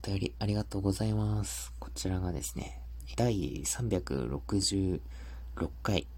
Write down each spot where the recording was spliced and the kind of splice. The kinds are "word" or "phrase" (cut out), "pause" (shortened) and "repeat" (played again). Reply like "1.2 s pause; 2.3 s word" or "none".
3.1 s phrase